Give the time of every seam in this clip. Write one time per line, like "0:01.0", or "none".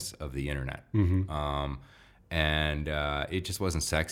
none